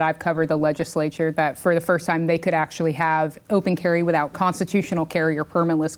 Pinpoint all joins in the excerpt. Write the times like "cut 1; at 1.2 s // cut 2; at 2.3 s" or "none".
cut 1; at 4.3 s

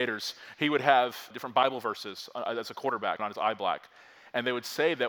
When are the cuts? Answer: cut 1; at 1.3 s // cut 2; at 3.2 s

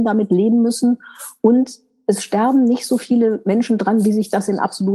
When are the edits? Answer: none

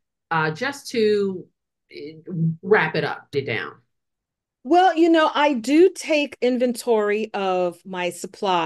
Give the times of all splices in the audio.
cut 1; at 3.3 s

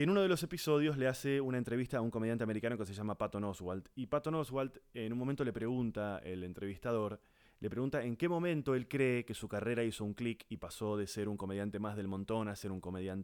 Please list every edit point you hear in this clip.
none

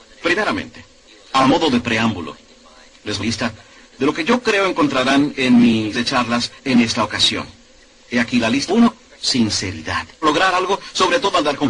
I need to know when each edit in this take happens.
cut 1; at 1.1 s // cut 2; at 3.2 s // cut 3; at 5.9 s // cut 4; at 6.6 s // cut 5; at 8.7 s // cut 6; at 10.2 s

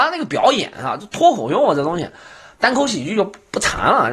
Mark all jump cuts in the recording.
none

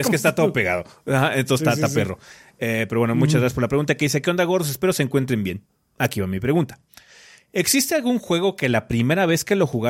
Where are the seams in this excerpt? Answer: none

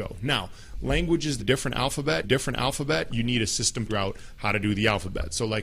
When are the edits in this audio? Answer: cut 1; at 1.4 s // cut 2; at 2.2 s // cut 3; at 3.9 s

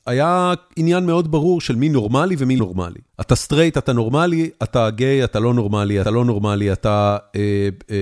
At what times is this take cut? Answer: cut 1; at 2.6 s // cut 2; at 3.1 s // cut 3; at 6.0 s

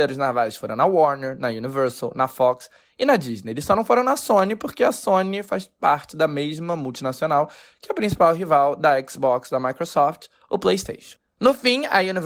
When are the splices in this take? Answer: none

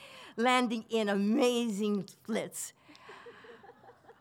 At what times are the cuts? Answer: none

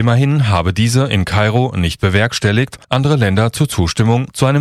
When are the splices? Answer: cut 1; at 2.8 s

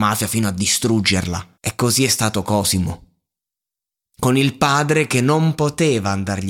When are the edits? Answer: cut 1; at 1.6 s

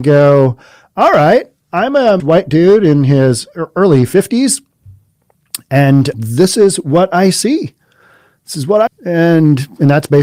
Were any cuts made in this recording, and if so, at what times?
cut 1; at 2.2 s // cut 2; at 6.1 s // cut 3; at 8.9 s

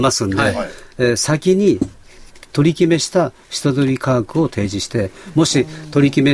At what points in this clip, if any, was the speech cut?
none

